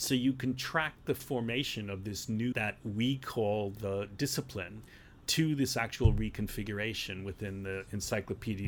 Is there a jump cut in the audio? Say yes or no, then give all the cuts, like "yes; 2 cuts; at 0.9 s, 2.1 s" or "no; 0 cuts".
yes; 2 cuts; at 2.5 s, 5.2 s